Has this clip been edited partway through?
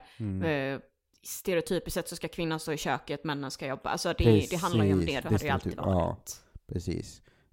yes; 1 cut; at 5.2 s

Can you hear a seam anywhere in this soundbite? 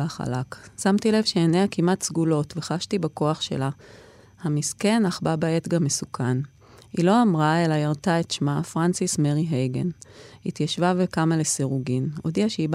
no; 0 cuts

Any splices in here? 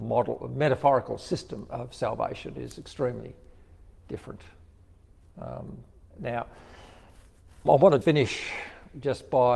yes; 3 cuts; at 4.0 s, 7.7 s, 8.0 s

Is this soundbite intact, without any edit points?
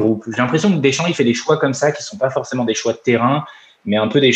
yes; 0 cuts

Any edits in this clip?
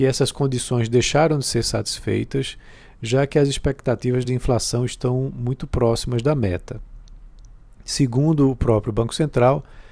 no; 0 cuts

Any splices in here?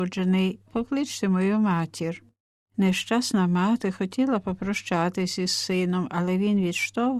no; 0 cuts

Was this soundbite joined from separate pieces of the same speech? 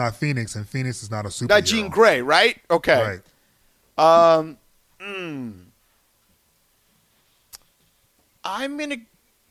no; 0 cuts

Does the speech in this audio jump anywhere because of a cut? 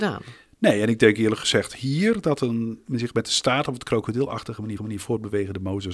yes; 1 cut; at 4.8 s

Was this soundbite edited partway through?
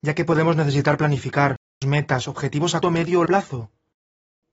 yes; 3 cuts; at 1.8 s, 2.8 s, 3.3 s

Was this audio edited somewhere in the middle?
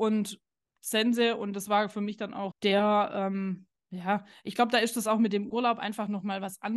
yes; 1 cut; at 2.5 s

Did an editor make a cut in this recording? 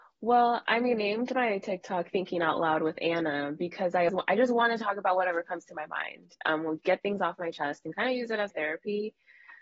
yes; 3 cuts; at 0.9 s, 4.1 s, 8.5 s

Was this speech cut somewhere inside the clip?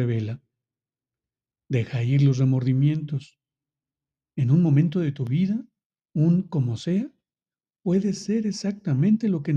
no; 0 cuts

